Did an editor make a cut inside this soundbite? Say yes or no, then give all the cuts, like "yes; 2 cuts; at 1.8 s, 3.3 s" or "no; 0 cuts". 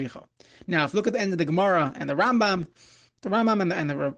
no; 0 cuts